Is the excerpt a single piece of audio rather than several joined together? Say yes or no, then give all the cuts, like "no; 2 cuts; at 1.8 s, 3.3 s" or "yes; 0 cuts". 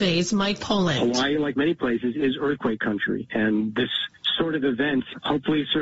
yes; 0 cuts